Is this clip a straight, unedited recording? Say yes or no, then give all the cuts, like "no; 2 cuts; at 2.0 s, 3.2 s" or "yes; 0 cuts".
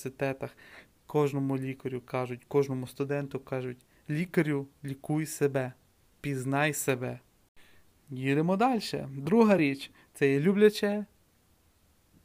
yes; 0 cuts